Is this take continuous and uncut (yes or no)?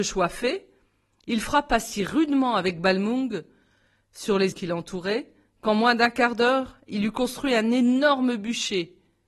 no